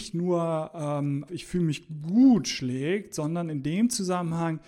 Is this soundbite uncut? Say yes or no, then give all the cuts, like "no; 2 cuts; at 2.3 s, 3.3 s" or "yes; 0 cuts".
no; 1 cut; at 1.3 s